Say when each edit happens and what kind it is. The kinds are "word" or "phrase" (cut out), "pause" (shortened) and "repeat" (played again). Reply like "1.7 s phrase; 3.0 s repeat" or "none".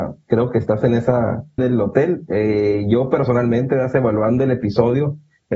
1.6 s word